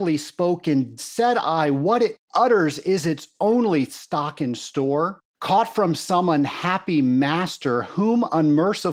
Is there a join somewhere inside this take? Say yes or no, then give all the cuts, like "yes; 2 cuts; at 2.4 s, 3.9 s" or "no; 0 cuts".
yes; 2 cuts; at 1.0 s, 5.3 s